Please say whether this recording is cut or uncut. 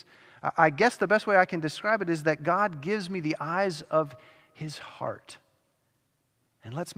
uncut